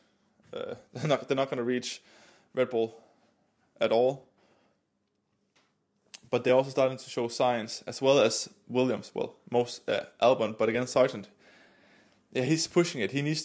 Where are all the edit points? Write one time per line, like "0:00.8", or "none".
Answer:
none